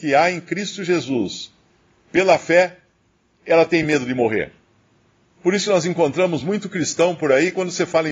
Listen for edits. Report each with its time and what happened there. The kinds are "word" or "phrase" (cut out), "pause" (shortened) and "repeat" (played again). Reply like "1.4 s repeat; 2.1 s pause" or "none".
none